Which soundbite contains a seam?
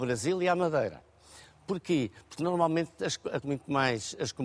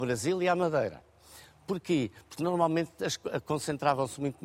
first; 1 cut; at 3.4 s

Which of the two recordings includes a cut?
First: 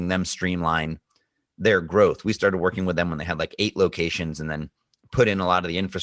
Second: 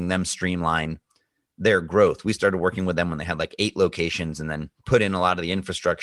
second; 1 cut; at 4.8 s

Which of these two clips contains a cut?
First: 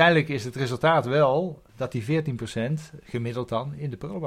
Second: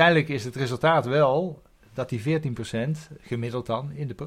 first; 1 cut; at 1.7 s

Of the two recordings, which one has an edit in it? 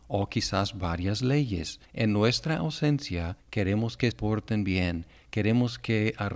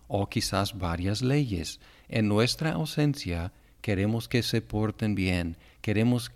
first; 3 cuts; at 1.9 s, 3.4 s, 4.1 s

